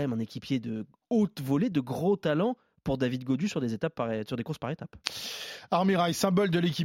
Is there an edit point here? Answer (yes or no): no